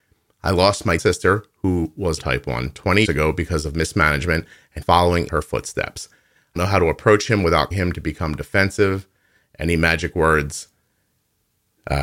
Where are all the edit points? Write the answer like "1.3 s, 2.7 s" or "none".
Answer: 1.0 s, 2.2 s, 3.0 s, 4.8 s, 5.3 s, 6.6 s, 7.7 s